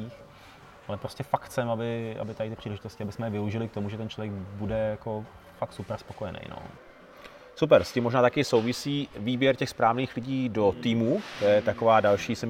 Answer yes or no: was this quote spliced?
no